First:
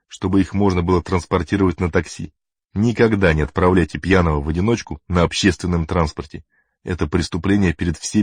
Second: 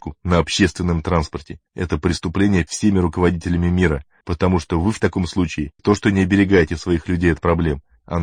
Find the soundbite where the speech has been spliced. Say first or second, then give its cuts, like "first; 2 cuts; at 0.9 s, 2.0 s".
second; 4 cuts; at 1.7 s, 2.7 s, 4.2 s, 5.8 s